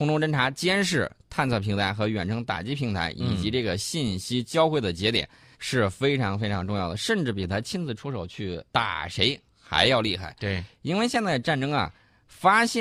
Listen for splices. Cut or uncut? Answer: cut